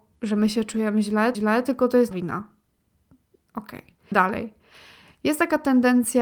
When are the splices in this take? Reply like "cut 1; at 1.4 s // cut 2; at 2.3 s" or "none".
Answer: cut 1; at 1.3 s // cut 2; at 2.1 s // cut 3; at 4.1 s